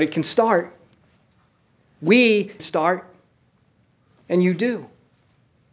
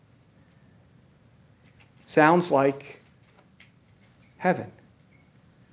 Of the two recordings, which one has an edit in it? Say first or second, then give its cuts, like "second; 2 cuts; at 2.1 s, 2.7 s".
first; 1 cut; at 2.6 s